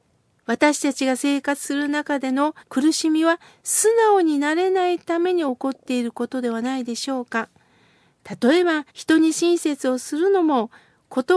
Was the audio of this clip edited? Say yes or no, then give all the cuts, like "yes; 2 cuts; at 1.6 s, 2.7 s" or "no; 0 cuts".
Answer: yes; 2 cuts; at 2.6 s, 8.9 s